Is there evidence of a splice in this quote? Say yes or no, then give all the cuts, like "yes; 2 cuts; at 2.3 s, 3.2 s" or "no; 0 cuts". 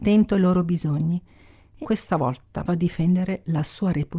yes; 2 cuts; at 1.8 s, 2.7 s